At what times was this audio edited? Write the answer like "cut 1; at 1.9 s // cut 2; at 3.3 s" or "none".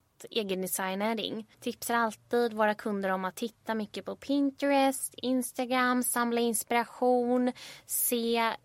cut 1; at 1.5 s